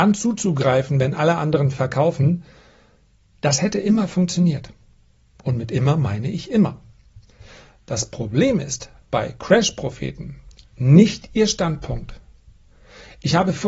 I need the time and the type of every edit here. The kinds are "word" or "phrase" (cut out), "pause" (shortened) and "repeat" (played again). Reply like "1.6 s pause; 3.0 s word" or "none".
none

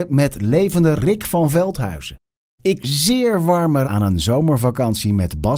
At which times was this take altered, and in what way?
1.0 s word; 2.8 s word; 3.8 s word

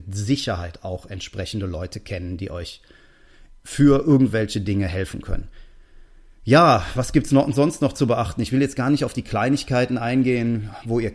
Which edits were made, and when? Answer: none

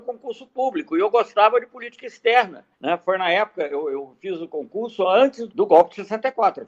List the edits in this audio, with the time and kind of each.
2.7 s pause; 5.5 s word

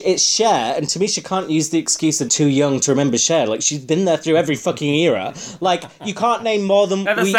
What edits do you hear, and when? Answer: 2.3 s word

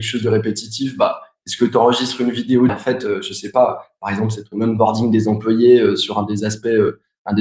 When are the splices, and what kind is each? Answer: 2.7 s phrase

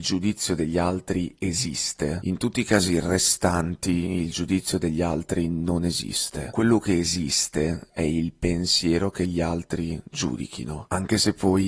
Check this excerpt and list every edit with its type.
none

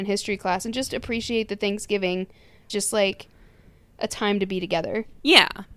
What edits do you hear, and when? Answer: 2.7 s phrase

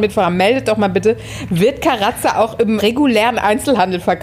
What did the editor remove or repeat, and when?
2.8 s word

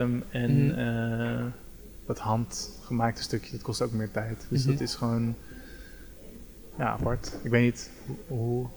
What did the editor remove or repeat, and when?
none

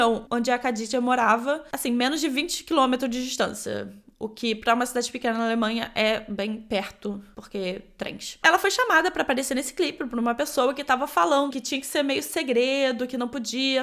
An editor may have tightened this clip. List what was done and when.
11.5 s word

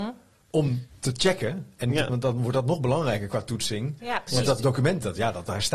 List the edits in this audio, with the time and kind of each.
2.1 s word

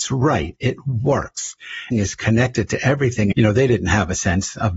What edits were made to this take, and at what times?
1.9 s word; 3.3 s word

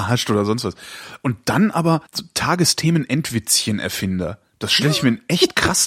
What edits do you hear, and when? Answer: 2.1 s pause

